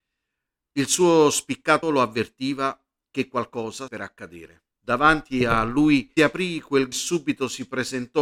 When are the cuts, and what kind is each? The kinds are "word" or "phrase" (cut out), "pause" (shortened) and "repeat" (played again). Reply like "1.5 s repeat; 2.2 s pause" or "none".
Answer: 1.8 s word; 3.9 s word; 4.7 s pause; 6.2 s word; 6.9 s phrase